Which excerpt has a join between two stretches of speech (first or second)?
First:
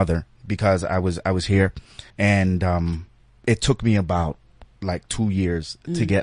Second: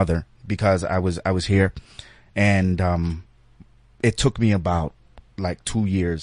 first